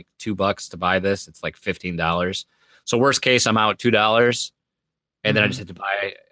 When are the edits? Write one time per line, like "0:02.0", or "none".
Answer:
none